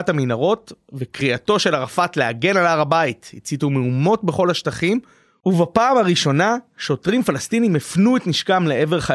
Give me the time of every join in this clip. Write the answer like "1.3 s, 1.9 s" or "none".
none